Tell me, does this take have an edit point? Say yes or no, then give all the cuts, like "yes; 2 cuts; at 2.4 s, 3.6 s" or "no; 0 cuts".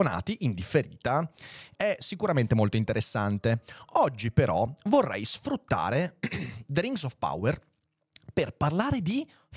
no; 0 cuts